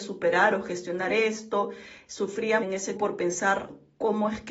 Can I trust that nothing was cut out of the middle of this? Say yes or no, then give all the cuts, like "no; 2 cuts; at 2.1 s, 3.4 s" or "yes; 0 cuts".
no; 2 cuts; at 2.6 s, 3.0 s